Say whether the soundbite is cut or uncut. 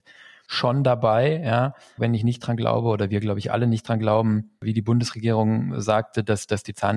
cut